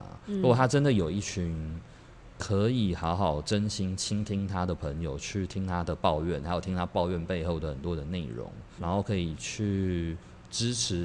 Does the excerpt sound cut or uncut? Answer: cut